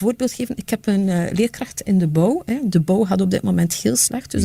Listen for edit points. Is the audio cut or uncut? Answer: uncut